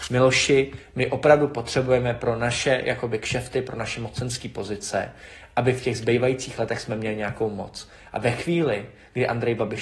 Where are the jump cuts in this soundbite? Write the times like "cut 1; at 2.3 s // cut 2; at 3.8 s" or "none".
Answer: none